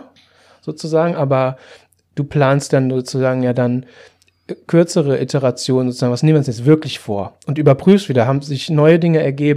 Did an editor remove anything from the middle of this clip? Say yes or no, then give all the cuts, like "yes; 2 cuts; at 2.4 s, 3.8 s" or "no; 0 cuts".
no; 0 cuts